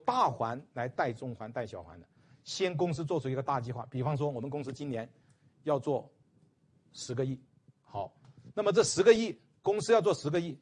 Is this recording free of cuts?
yes; 0 cuts

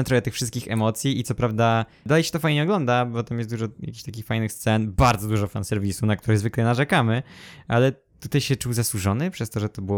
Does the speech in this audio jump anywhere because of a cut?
no; 0 cuts

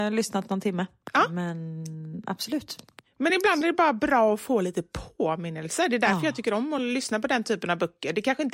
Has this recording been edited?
no; 0 cuts

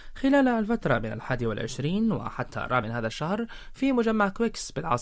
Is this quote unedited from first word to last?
no; 1 cut; at 2.8 s

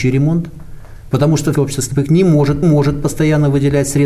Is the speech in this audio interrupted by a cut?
yes; 2 cuts; at 1.5 s, 2.6 s

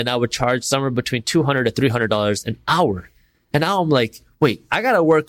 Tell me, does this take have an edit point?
no; 0 cuts

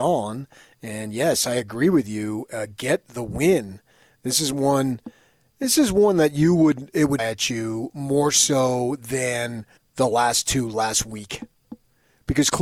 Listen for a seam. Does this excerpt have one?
yes; 2 cuts; at 7.2 s, 9.8 s

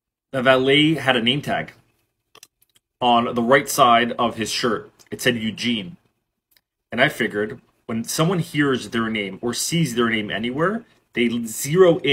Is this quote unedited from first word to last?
yes; 0 cuts

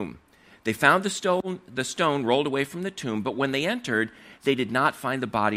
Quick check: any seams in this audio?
no; 0 cuts

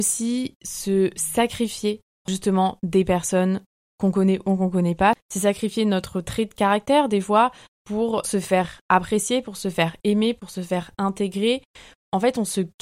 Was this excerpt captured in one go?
no; 2 cuts; at 2.3 s, 8.2 s

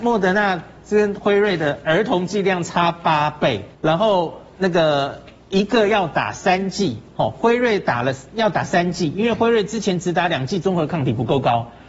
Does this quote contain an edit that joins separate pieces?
yes; 1 cut; at 3.7 s

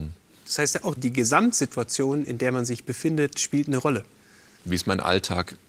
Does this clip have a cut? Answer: yes; 1 cut; at 1.0 s

